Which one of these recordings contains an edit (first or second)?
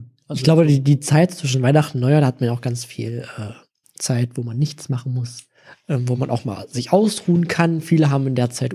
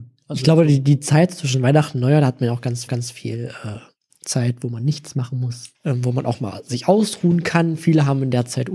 second